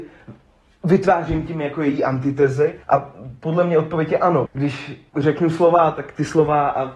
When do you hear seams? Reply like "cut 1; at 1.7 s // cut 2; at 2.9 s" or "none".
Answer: cut 1; at 2.8 s // cut 2; at 4.5 s // cut 3; at 5.1 s

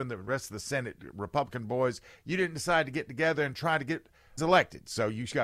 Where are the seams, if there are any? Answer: cut 1; at 4.4 s

